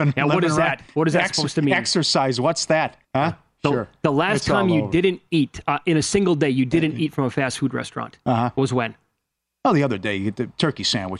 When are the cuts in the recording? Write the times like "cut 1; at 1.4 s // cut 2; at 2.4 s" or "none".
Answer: cut 1; at 3.0 s // cut 2; at 9.4 s